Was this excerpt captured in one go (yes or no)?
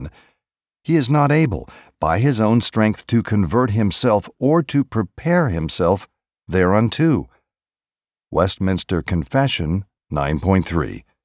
yes